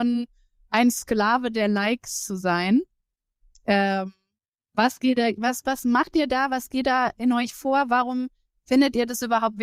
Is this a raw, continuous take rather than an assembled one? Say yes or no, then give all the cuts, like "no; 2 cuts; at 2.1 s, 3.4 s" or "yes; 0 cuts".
yes; 0 cuts